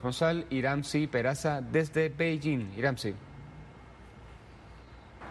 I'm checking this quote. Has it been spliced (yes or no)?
no